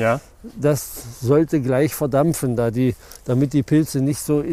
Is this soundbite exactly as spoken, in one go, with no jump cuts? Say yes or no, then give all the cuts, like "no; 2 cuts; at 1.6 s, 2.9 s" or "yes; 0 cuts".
yes; 0 cuts